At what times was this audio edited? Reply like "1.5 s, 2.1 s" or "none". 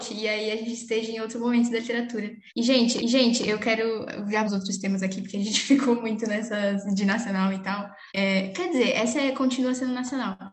2.5 s, 3.0 s, 4.5 s, 8.1 s